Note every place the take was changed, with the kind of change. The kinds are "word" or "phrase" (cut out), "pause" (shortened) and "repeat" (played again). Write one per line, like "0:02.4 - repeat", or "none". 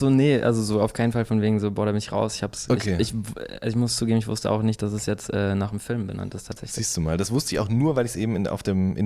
none